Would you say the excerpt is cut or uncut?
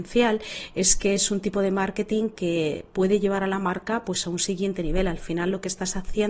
uncut